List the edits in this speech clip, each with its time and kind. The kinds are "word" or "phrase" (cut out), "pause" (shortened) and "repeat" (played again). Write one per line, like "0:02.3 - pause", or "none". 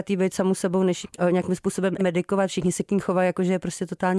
0:01.0 - phrase
0:02.0 - word